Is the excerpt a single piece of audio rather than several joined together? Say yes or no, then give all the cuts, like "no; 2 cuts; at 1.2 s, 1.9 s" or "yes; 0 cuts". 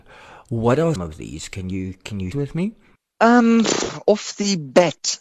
no; 2 cuts; at 1.0 s, 2.3 s